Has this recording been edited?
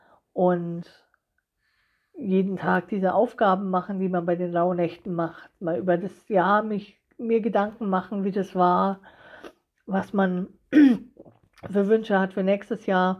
no; 0 cuts

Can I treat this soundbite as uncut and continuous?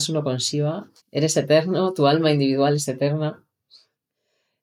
no; 1 cut; at 1.0 s

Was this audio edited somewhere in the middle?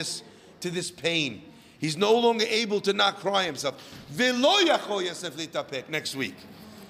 no; 0 cuts

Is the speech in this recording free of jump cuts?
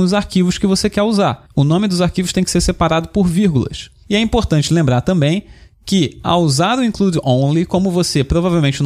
yes; 0 cuts

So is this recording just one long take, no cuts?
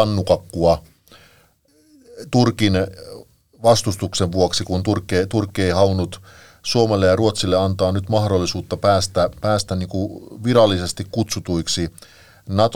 yes; 0 cuts

